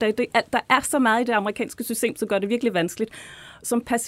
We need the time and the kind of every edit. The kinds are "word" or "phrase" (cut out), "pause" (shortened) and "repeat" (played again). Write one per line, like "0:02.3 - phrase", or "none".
none